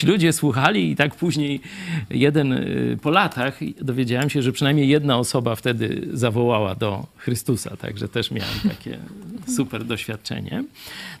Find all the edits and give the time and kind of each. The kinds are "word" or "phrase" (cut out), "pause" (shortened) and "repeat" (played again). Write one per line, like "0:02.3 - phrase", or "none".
none